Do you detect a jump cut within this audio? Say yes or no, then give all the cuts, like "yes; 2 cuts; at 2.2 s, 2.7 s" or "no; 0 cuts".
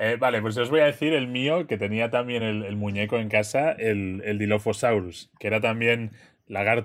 no; 0 cuts